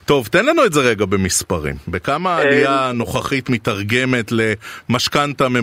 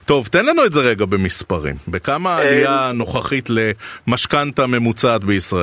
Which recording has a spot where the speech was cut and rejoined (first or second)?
second